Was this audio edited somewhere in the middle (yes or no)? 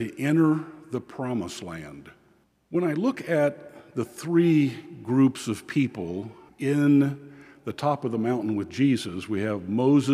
yes